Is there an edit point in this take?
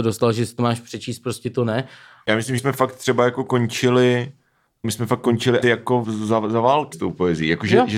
yes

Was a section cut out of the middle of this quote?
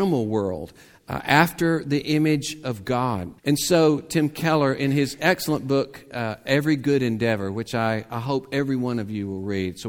yes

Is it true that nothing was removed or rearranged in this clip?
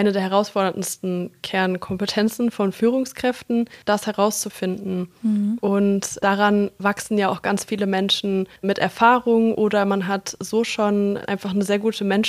no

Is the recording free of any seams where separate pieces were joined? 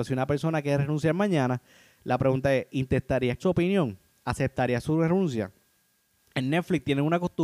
no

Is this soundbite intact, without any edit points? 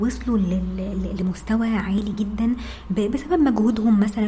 yes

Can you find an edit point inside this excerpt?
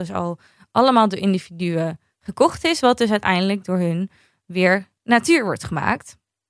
no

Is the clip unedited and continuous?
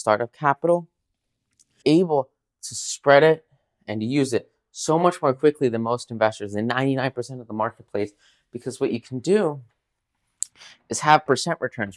no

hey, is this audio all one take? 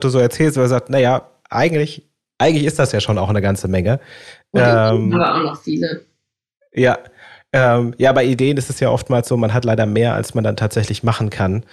yes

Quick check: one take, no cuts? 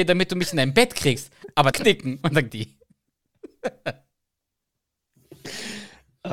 no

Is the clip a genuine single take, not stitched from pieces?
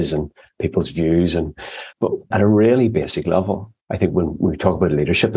no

